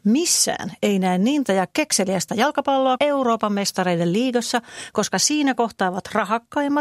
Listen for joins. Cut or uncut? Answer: cut